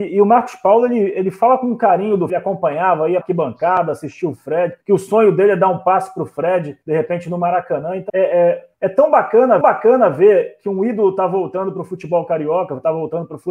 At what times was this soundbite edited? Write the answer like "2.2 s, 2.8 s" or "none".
2.3 s, 3.2 s, 4.8 s, 6.8 s, 8.1 s, 8.7 s, 9.6 s